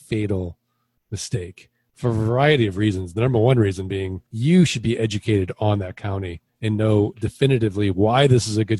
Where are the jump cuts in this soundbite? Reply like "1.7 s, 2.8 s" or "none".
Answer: 4.3 s, 6.5 s